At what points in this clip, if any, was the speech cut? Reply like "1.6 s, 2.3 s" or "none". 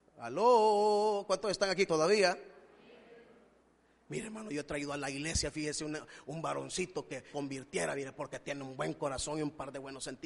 1.9 s, 3.6 s, 7.3 s